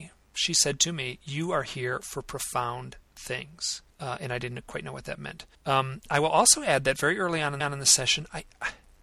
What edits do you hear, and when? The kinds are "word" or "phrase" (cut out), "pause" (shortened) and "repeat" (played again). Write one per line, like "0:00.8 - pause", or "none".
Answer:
0:03.9 - pause
0:05.5 - pause
0:07.6 - repeat